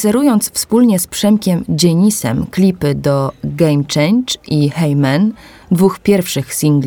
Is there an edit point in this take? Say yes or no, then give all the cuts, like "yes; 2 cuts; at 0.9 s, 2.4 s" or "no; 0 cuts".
no; 0 cuts